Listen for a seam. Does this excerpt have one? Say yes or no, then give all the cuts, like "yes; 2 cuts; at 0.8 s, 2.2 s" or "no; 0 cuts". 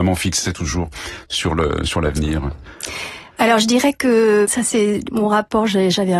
no; 0 cuts